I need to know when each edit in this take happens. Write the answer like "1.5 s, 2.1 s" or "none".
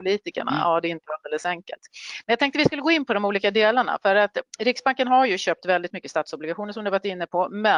4.5 s